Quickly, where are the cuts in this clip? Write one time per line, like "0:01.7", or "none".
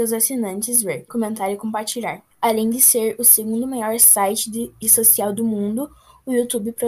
0:01.1
0:02.3
0:04.8